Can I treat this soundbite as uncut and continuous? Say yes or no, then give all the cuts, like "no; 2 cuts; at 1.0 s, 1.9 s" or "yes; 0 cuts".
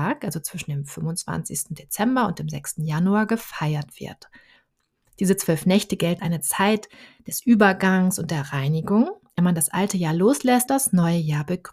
no; 3 cuts; at 6.2 s, 9.4 s, 10.7 s